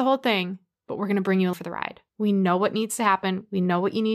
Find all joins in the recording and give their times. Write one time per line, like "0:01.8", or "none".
0:01.5
0:02.1